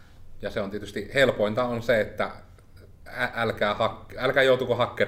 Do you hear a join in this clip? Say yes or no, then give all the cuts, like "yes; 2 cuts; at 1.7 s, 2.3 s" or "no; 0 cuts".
no; 0 cuts